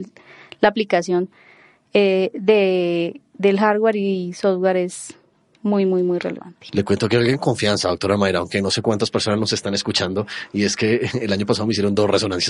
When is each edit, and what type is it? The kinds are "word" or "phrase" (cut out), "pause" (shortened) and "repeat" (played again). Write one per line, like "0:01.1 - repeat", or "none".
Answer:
none